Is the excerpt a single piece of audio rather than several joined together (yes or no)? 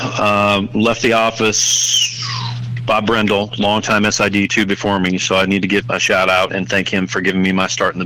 no